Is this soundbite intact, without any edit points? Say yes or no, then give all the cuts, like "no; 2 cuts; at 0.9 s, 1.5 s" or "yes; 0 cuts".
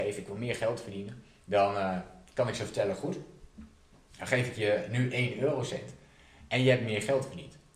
yes; 0 cuts